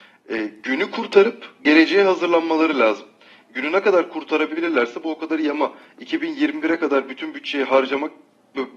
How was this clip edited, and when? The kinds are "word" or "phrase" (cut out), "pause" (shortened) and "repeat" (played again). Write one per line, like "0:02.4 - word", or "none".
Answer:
none